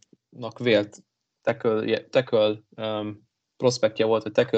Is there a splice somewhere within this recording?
yes; 1 cut; at 2.7 s

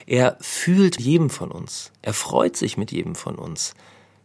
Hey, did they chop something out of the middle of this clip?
yes; 1 cut; at 1.0 s

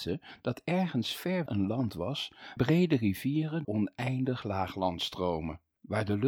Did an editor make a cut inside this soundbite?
yes; 3 cuts; at 1.5 s, 2.6 s, 3.6 s

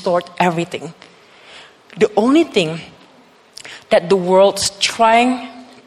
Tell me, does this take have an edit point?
no; 0 cuts

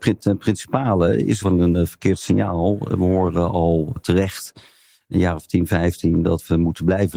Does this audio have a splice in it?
yes; 2 cuts; at 1.4 s, 4.0 s

